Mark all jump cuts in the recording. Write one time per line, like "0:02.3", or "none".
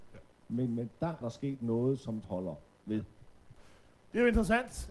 0:01.2
0:02.2